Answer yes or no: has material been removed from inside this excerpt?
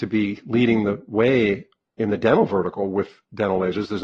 no